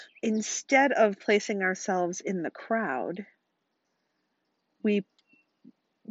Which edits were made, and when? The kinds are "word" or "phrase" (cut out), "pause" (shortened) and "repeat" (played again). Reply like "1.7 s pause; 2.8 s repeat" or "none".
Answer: none